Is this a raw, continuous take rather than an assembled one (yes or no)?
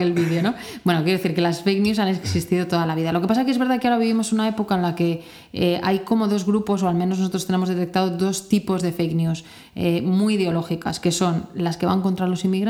yes